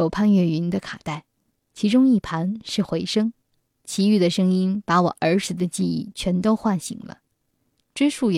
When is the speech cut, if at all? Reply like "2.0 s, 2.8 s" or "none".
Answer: none